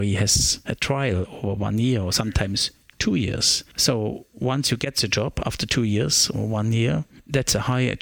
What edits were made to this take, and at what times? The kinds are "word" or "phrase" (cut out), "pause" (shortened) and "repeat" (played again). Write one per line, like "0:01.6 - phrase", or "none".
none